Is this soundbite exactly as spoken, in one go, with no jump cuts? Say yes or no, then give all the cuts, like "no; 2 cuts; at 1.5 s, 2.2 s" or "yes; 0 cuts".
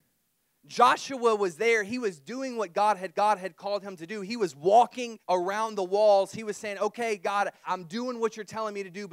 no; 3 cuts; at 3.1 s, 5.2 s, 7.6 s